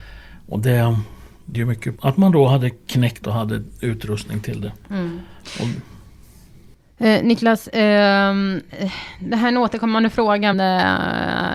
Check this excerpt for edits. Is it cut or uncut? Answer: cut